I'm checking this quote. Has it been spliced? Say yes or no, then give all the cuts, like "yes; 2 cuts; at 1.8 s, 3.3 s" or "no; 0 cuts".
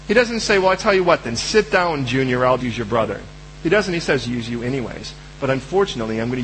yes; 2 cuts; at 2.6 s, 4.3 s